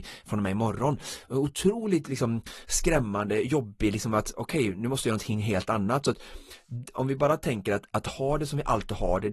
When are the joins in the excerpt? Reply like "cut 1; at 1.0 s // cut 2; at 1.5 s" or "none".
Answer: none